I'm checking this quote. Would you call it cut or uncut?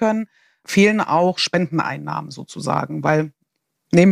uncut